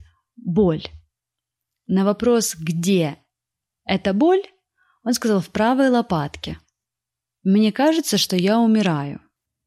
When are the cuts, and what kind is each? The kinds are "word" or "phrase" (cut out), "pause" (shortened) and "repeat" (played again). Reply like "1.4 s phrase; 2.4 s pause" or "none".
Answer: none

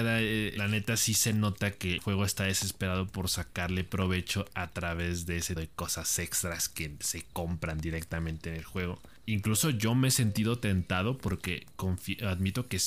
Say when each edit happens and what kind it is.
2.0 s word; 5.6 s word

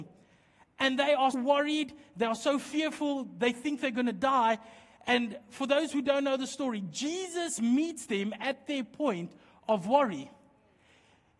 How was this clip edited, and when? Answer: 1.3 s word

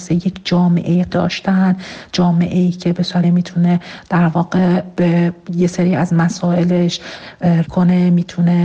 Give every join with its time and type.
1.1 s word; 3.2 s word; 7.6 s word

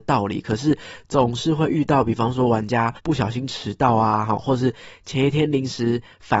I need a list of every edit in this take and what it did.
3.0 s pause

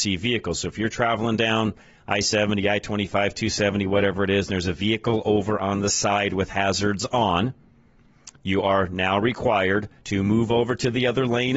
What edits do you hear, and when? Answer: 10.0 s pause

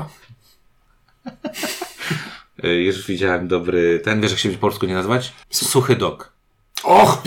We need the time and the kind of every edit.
5.4 s pause

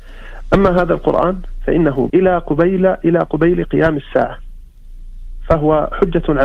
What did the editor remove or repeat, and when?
2.1 s word

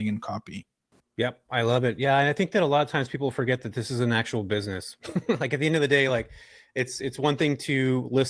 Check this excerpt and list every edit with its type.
none

